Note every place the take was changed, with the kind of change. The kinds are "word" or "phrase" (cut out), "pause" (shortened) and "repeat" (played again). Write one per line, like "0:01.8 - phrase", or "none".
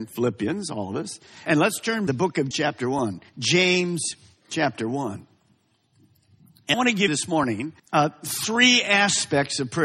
0:02.1 - phrase
0:02.5 - word
0:06.7 - word
0:07.1 - word
0:07.8 - pause